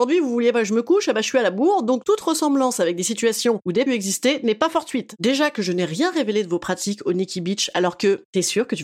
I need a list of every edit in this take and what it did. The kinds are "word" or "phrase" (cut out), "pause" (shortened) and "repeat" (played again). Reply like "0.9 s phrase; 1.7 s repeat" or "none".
3.9 s phrase